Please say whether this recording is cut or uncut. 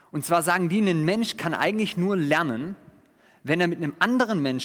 uncut